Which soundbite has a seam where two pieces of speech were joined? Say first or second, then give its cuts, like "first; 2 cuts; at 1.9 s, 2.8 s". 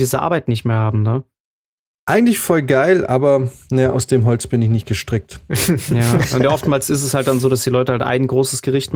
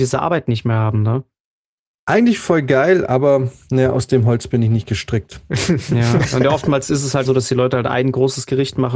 second; 1 cut; at 7.2 s